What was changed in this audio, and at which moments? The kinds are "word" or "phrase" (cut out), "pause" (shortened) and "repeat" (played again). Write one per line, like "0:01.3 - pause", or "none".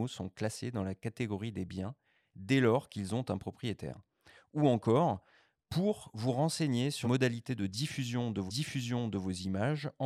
0:07.0 - word
0:08.5 - repeat